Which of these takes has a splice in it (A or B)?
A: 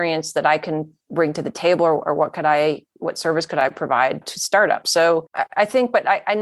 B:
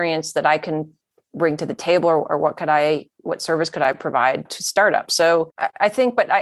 A